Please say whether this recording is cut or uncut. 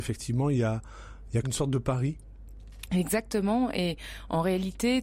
cut